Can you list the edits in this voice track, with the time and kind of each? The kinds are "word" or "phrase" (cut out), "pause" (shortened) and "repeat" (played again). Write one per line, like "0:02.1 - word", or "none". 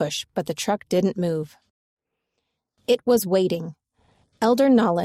none